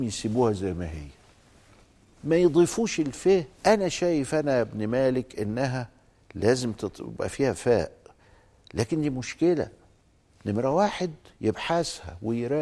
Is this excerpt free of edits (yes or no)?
no